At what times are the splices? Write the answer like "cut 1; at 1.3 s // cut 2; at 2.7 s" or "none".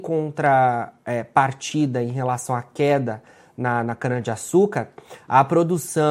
none